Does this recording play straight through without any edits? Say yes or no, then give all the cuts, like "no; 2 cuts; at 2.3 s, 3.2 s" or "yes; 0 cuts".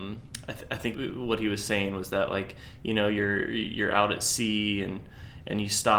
no; 1 cut; at 0.9 s